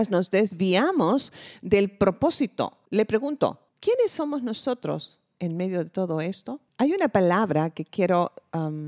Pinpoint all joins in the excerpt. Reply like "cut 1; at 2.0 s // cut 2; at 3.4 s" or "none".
cut 1; at 2.9 s // cut 2; at 3.7 s // cut 3; at 6.7 s